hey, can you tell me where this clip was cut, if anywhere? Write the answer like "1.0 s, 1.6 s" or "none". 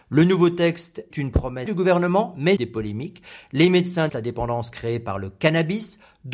1.1 s, 1.7 s, 2.6 s, 4.1 s